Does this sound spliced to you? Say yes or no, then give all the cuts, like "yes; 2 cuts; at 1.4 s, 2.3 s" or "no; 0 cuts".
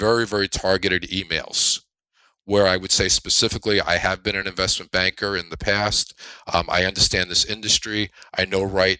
no; 0 cuts